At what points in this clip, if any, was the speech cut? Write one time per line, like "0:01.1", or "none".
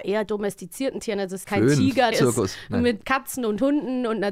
0:01.4
0:02.1
0:03.0